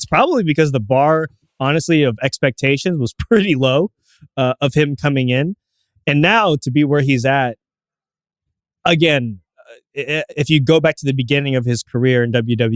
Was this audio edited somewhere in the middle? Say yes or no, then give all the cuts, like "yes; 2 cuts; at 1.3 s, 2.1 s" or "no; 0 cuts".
no; 0 cuts